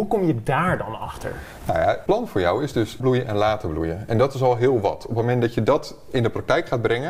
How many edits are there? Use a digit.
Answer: 2